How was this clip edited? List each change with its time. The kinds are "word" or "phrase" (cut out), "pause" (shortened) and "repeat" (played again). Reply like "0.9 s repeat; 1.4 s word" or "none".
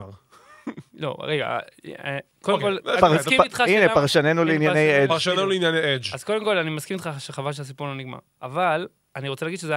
2.3 s pause